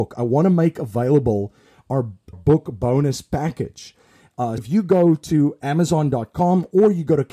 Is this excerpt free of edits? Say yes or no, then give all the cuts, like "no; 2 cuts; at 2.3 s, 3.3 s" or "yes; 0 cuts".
no; 2 cuts; at 2.3 s, 4.6 s